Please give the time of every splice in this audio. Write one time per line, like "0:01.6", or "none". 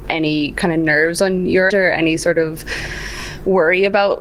0:01.7